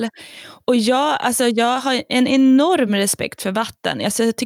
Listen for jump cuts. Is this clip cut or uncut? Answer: uncut